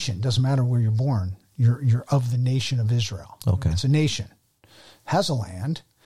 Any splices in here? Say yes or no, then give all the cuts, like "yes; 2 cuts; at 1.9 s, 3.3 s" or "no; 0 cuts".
no; 0 cuts